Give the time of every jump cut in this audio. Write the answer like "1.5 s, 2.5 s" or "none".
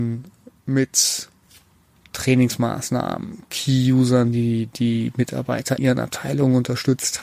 5.8 s